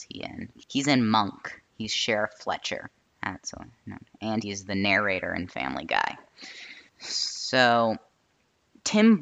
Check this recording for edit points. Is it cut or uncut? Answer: cut